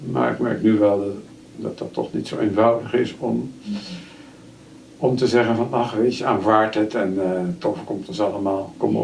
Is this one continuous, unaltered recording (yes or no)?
yes